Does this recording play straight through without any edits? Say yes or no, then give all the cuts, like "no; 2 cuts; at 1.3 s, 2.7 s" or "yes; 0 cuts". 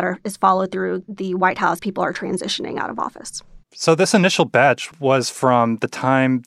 no; 2 cuts; at 1.8 s, 3.6 s